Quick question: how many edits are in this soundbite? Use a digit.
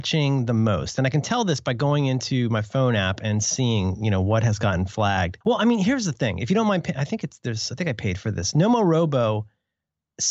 1